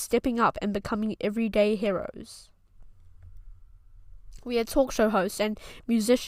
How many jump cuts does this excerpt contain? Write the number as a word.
zero